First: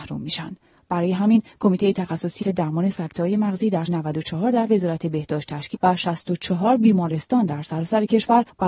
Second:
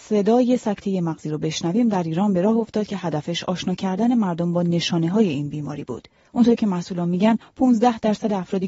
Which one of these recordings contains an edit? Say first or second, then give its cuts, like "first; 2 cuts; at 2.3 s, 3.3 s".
first; 3 cuts; at 2.4 s, 3.9 s, 5.7 s